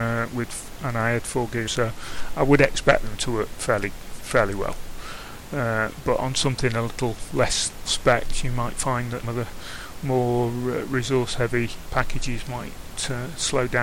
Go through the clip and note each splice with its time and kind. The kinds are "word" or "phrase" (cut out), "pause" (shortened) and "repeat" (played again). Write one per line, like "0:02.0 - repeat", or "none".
0:01.7 - phrase
0:07.8 - word
0:09.2 - word